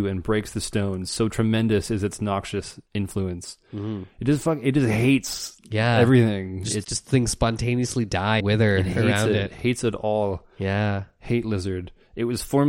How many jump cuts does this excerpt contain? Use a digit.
3